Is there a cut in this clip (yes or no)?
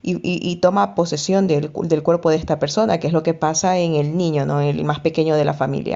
no